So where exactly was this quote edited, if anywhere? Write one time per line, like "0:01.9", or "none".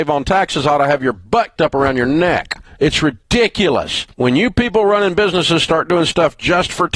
0:01.6
0:02.7
0:04.1

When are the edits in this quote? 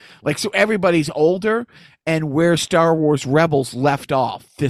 none

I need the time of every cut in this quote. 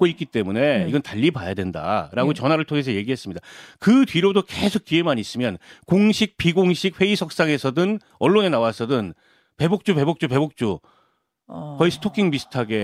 none

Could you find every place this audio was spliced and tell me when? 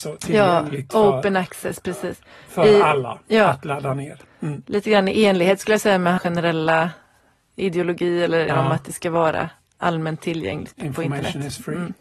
0:06.2
0:08.5
0:10.7

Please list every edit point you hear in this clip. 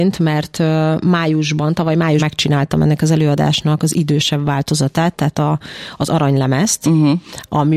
0:02.2

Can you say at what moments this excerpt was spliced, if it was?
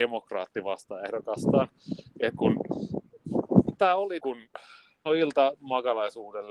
0:02.4
0:03.8
0:04.2
0:05.1
0:05.6

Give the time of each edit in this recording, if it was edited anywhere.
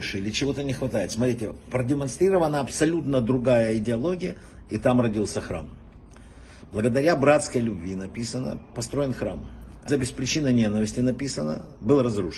0:09.9

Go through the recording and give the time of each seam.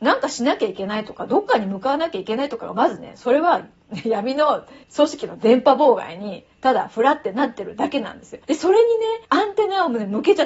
0:04.8
0:08.4
0:09.2

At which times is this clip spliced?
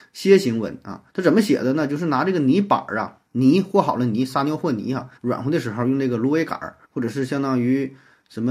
0:01.1
0:03.3
0:05.2
0:06.8

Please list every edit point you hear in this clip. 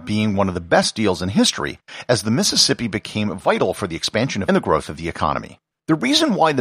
0:04.5
0:05.7

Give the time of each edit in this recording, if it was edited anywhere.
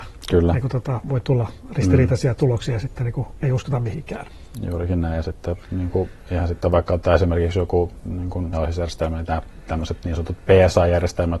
0:08.5

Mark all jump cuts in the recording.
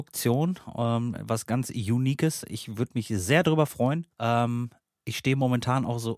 0:04.1

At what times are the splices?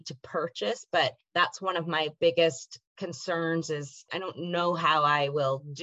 none

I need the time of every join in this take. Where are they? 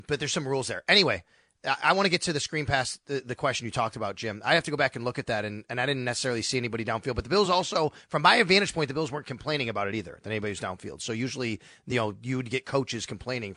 none

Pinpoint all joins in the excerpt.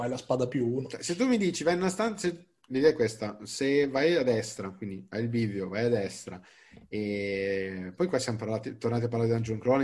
none

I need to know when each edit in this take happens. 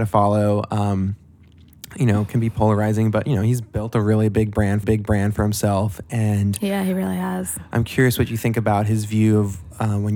0:04.8

